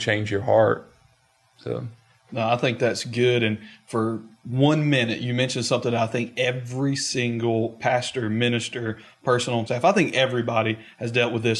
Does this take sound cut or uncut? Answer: cut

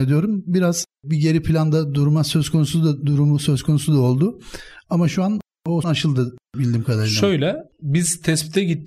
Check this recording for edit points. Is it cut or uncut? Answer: cut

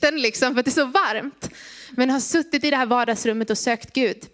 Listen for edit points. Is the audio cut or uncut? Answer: uncut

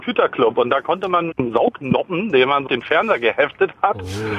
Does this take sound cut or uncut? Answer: cut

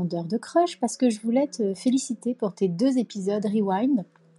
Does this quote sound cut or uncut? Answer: uncut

